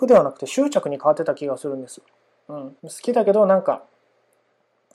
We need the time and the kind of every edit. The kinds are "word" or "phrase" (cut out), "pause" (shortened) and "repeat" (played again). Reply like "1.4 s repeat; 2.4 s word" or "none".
2.8 s pause